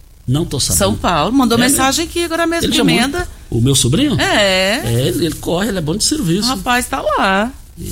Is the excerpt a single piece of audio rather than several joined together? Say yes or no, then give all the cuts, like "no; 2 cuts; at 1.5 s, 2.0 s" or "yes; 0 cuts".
no; 1 cut; at 2.7 s